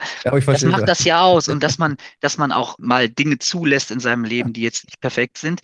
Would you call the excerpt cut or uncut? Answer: cut